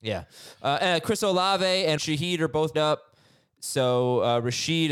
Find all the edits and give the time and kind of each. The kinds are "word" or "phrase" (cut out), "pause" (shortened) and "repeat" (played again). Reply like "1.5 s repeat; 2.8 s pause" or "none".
2.0 s word; 2.7 s word

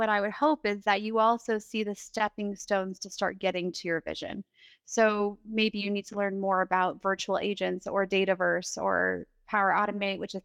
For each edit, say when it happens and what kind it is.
none

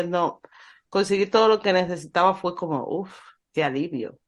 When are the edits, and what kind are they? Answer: none

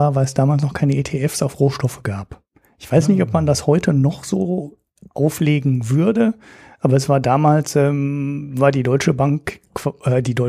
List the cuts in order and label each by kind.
none

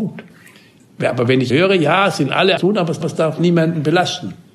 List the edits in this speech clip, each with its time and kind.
1.5 s word; 2.6 s phrase; 3.0 s repeat

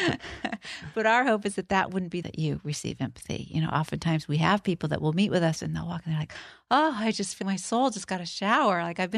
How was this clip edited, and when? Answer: 2.2 s phrase; 7.4 s word

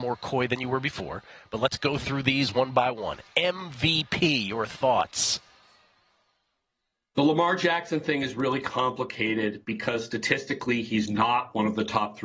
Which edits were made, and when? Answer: none

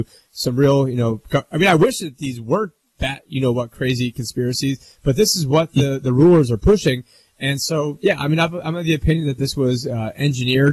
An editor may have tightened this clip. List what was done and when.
none

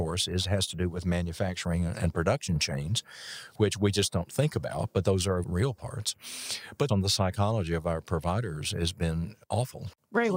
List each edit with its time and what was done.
5.4 s word; 6.9 s phrase

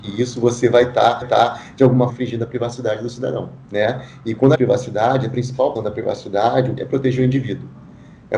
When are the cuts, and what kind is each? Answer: 1.2 s repeat; 2.1 s word; 3.6 s pause; 4.6 s phrase; 5.8 s word; 6.8 s phrase

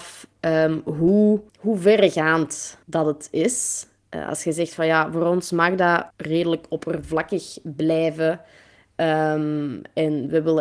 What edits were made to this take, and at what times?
1.5 s pause; 2.8 s pause; 6.1 s pause

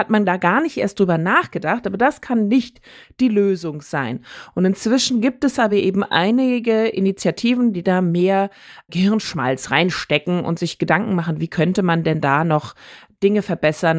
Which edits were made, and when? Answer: none

